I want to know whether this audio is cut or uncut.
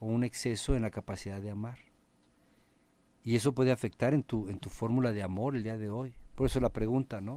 uncut